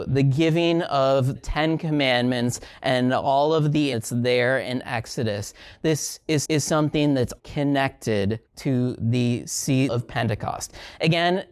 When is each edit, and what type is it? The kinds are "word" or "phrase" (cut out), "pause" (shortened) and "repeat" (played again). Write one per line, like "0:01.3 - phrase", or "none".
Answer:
0:01.4 - word
0:03.9 - word
0:06.4 - repeat
0:07.4 - word
0:08.5 - pause
0:09.9 - phrase